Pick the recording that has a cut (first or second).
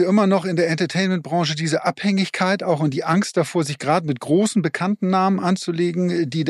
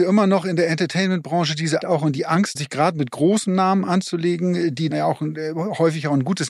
second